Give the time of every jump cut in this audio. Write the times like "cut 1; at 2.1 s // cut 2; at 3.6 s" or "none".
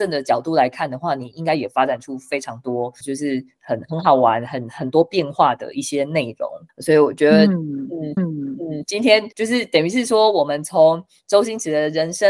cut 1; at 3.0 s // cut 2; at 6.7 s // cut 3; at 8.2 s // cut 4; at 9.3 s